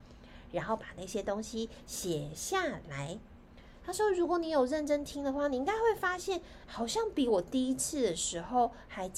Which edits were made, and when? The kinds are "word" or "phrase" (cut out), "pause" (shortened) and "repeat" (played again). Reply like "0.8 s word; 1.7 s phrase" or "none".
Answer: 6.7 s word